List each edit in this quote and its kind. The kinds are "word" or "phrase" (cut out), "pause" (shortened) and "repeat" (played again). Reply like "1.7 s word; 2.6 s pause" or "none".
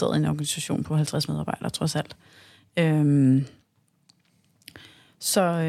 none